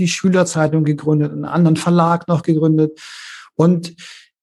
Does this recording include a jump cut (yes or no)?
no